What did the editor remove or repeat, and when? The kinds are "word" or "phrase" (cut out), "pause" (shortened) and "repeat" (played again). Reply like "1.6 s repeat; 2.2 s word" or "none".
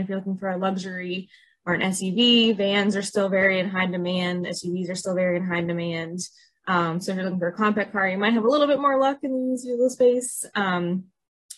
none